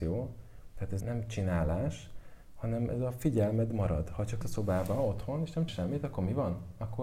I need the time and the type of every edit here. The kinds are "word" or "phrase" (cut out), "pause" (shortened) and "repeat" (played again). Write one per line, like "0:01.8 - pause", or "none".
0:01.0 - word
0:04.4 - word
0:05.7 - word